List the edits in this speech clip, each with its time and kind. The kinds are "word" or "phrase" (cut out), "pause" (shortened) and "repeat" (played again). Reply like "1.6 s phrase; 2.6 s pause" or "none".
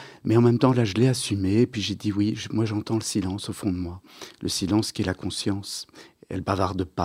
none